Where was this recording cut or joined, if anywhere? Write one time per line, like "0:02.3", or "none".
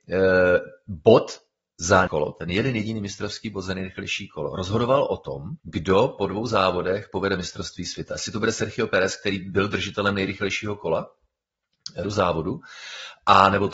0:02.1
0:05.6
0:12.0